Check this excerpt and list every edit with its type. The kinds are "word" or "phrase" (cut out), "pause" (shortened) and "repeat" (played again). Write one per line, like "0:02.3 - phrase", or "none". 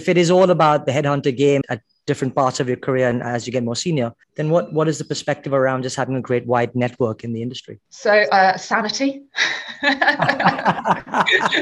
0:01.6 - word
0:04.2 - pause
0:07.9 - pause

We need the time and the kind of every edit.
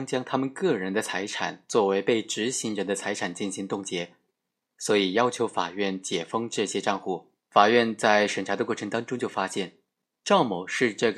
0:07.4 - pause

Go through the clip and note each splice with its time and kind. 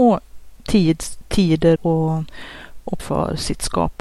0:01.8 - word
0:03.0 - word

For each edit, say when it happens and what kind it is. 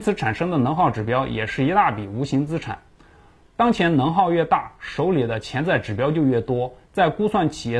none

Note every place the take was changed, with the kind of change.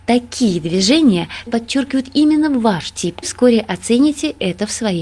0:01.5 - word
0:03.2 - phrase

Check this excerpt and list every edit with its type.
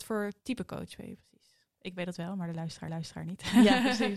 0:02.9 - repeat

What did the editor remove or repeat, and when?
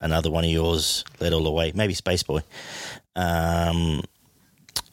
none

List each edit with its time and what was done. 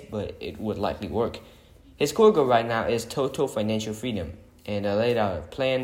none

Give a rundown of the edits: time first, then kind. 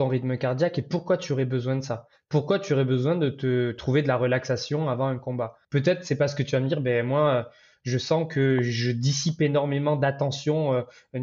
0:05.6 - pause

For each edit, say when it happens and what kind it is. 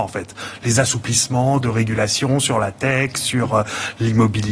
none

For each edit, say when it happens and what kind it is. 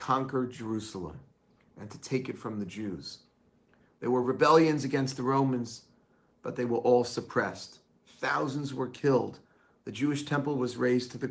none

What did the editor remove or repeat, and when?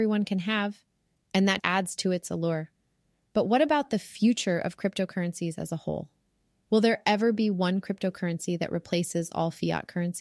0:01.6 - word

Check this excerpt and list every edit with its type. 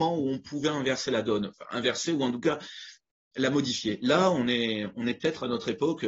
none

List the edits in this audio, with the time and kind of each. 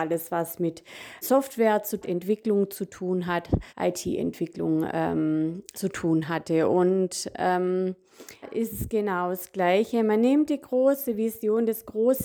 0:01.2 - word
0:02.0 - phrase
0:03.7 - pause
0:05.7 - word
0:08.4 - word

